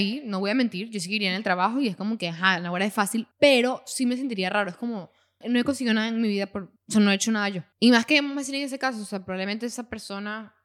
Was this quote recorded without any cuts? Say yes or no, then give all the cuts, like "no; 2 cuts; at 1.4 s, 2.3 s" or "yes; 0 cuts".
no; 4 cuts; at 3.3 s, 5.4 s, 6.8 s, 7.7 s